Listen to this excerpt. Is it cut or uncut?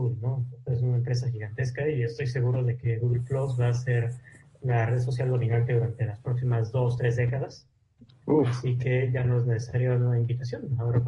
uncut